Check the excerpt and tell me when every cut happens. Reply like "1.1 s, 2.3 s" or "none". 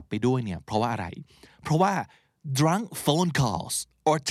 none